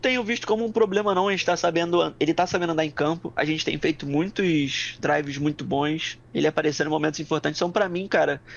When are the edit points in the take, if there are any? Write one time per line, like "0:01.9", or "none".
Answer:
0:06.2